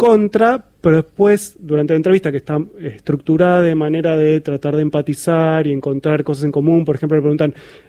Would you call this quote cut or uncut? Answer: uncut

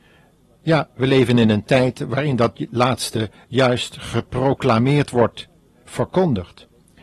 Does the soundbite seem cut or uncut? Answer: uncut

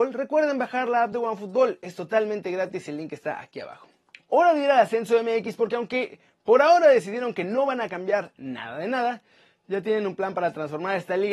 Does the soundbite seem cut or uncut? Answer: uncut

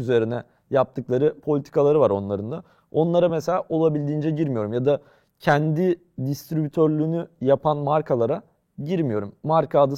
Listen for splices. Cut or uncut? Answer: uncut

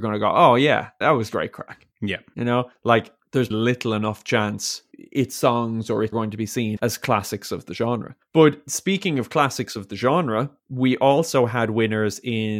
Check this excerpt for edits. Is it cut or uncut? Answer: cut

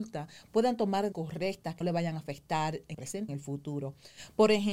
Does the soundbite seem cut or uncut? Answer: cut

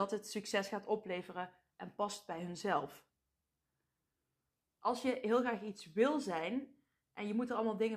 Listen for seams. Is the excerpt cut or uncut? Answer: uncut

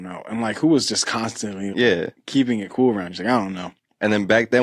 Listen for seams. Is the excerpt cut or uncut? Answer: cut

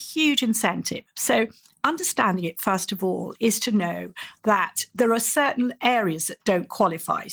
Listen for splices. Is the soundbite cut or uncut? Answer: uncut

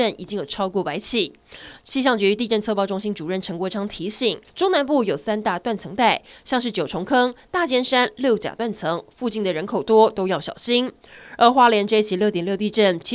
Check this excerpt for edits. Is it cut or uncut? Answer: cut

